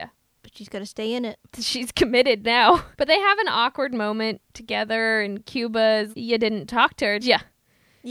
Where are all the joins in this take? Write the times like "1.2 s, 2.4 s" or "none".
1.5 s, 2.9 s, 4.4 s, 6.1 s, 7.2 s